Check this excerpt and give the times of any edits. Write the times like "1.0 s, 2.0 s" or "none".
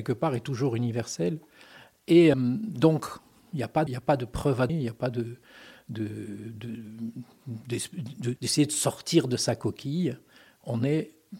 2.3 s, 3.9 s, 4.7 s, 8.4 s